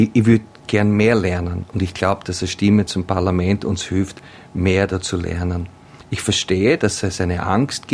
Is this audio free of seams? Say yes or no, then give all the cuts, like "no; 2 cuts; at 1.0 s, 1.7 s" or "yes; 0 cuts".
yes; 0 cuts